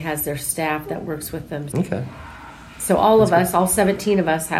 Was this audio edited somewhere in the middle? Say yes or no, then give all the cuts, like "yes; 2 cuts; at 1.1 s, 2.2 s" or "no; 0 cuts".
yes; 1 cut; at 1.7 s